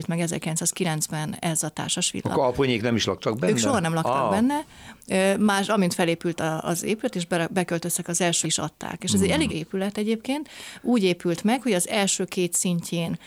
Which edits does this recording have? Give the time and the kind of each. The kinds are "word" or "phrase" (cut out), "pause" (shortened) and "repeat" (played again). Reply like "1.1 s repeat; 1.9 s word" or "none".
5.7 s word; 8.4 s phrase; 9.5 s word